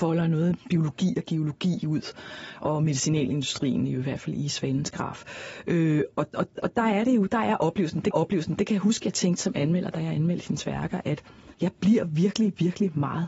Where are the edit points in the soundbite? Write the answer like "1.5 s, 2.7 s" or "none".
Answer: 8.1 s, 11.5 s